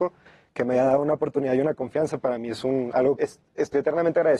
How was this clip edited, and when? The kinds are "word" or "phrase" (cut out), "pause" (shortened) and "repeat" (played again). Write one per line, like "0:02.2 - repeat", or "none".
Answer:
0:03.2 - word